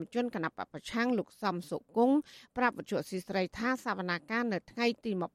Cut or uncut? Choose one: uncut